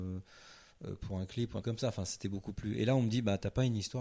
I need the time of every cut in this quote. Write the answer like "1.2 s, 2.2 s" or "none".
1.6 s